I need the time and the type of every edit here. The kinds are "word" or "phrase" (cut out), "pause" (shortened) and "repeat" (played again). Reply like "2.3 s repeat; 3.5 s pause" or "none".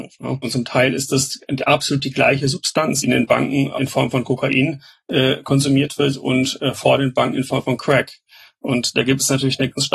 3.0 s phrase